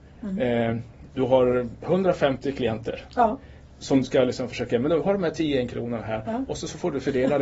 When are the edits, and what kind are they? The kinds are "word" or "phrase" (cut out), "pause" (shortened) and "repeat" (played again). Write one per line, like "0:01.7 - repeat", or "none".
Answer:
0:04.0 - word